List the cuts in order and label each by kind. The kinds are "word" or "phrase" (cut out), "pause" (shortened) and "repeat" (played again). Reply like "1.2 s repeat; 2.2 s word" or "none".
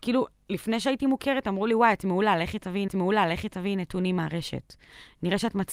2.9 s repeat